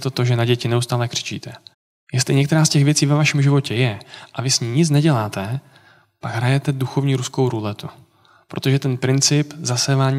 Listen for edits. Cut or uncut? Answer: cut